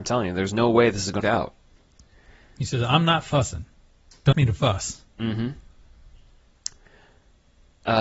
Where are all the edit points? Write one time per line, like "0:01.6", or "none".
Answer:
0:01.2
0:04.3
0:05.1